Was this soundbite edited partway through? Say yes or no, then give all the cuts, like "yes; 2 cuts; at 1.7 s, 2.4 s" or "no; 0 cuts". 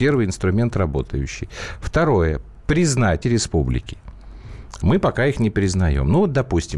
yes; 1 cut; at 3.2 s